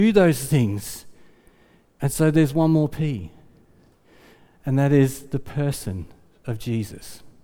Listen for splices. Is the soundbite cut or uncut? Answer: uncut